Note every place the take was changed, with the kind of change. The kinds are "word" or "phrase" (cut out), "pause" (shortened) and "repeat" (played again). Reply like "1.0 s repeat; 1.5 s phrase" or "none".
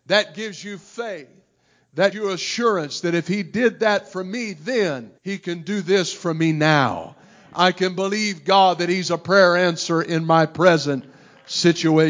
2.1 s word; 5.2 s pause